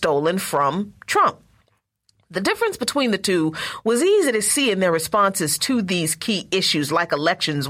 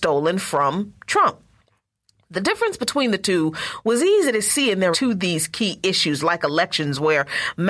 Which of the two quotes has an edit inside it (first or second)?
second